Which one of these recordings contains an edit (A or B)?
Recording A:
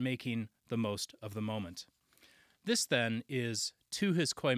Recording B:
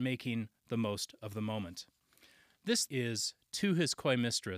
B